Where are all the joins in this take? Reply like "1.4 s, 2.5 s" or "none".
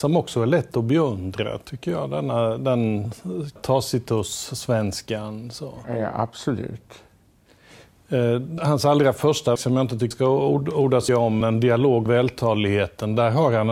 3.6 s, 8.6 s, 9.6 s, 10.1 s, 11.1 s, 11.4 s, 12.1 s